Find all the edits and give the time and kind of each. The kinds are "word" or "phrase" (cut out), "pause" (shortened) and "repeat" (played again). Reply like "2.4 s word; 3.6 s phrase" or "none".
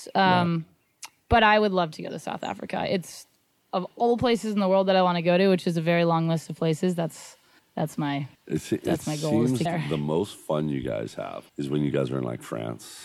3.7 s word; 7.6 s pause; 8.3 s pause; 9.7 s word; 11.5 s pause